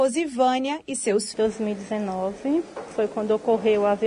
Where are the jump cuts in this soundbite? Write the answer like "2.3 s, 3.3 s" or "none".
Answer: 1.3 s